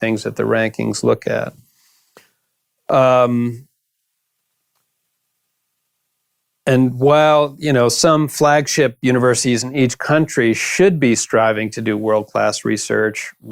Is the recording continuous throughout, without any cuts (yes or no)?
yes